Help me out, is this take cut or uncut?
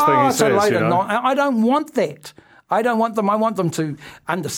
uncut